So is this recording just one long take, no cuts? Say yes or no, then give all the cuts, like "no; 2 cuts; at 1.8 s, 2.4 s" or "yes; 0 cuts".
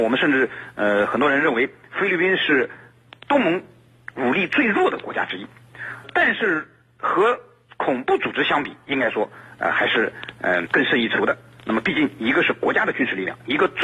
no; 2 cuts; at 6.0 s, 10.7 s